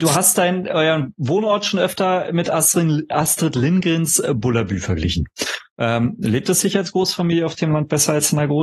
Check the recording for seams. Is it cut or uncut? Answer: uncut